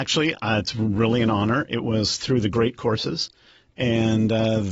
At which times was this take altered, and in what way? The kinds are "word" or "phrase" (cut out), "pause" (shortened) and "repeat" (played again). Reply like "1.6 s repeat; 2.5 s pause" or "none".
none